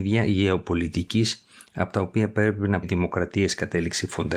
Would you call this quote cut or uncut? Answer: cut